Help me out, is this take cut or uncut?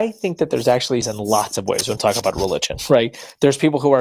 cut